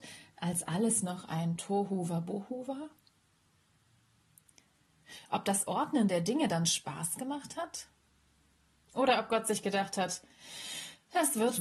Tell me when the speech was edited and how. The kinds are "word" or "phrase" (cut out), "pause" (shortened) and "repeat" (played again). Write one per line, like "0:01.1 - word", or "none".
none